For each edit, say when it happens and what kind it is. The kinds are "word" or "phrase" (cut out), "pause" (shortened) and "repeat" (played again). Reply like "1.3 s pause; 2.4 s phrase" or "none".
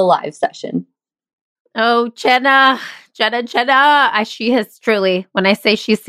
none